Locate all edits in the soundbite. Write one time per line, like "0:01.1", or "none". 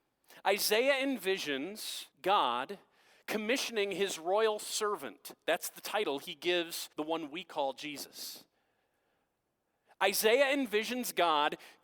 0:02.1
0:06.9